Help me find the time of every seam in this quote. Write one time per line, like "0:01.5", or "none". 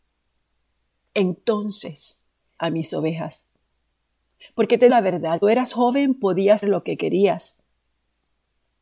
0:02.6
0:04.9
0:05.4
0:06.6